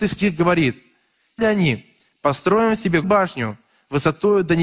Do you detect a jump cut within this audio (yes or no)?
yes